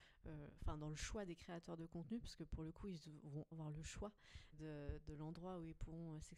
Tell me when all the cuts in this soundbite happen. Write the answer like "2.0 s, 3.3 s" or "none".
3.5 s, 4.5 s